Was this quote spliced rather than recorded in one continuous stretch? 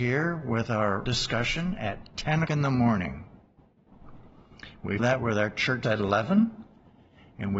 yes; 4 cuts; at 1.1 s, 2.5 s, 5.0 s, 5.8 s

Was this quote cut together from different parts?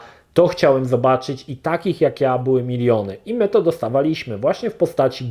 no; 0 cuts

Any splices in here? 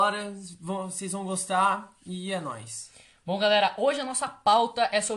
no; 0 cuts

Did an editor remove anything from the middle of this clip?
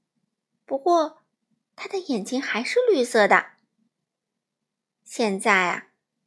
no; 0 cuts

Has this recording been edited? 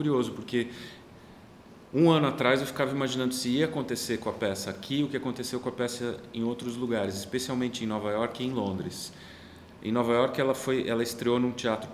no; 0 cuts

